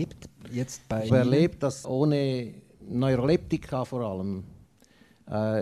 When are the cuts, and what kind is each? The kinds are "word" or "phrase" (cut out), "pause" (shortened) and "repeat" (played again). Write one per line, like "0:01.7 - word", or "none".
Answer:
0:01.1 - word
0:01.8 - word